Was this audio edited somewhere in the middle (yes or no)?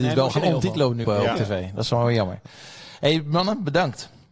yes